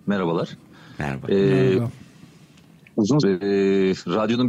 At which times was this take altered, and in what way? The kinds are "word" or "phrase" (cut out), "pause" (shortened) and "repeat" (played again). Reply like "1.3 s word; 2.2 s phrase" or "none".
3.2 s word